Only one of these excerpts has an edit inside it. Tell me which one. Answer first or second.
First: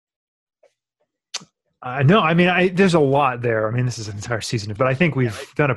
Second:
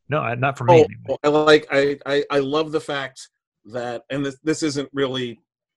first